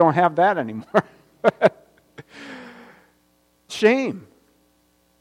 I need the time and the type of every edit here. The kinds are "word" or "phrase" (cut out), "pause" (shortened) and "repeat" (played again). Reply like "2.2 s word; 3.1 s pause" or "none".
3.7 s word

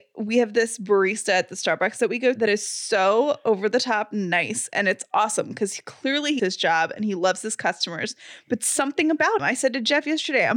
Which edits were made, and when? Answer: 2.4 s word; 6.4 s word; 9.4 s word

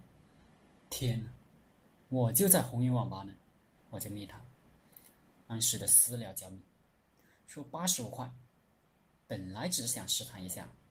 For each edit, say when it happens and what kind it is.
none

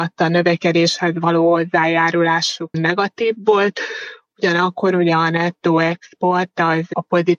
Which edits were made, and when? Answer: 2.7 s word

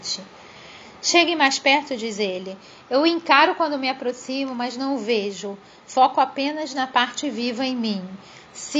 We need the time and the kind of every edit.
none

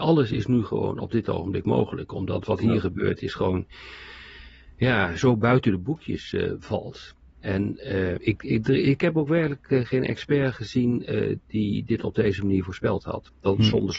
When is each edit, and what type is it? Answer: 8.2 s word

